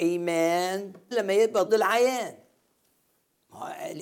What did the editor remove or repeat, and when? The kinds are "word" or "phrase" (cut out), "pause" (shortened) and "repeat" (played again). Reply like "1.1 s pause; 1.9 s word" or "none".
1.1 s word; 1.7 s word